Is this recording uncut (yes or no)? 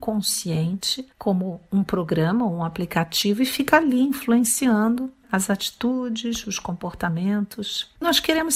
no